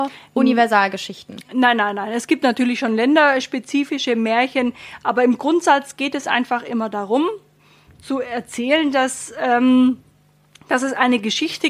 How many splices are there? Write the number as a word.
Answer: zero